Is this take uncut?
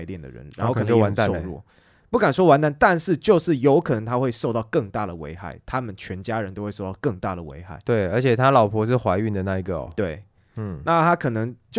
yes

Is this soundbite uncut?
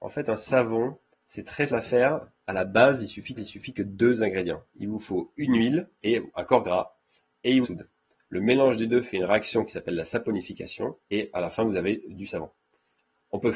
no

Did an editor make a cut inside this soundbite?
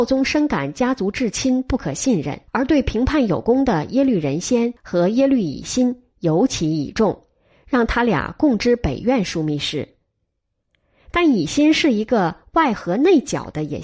yes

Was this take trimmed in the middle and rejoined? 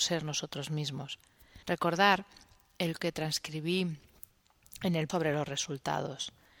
yes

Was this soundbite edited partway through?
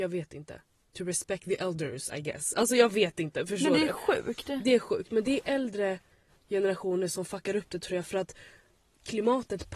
no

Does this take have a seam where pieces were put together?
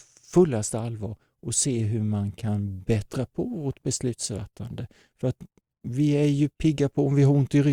no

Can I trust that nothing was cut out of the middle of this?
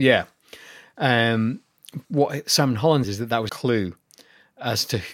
no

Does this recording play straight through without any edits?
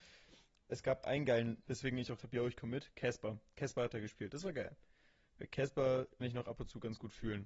no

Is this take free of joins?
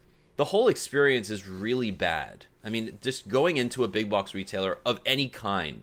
yes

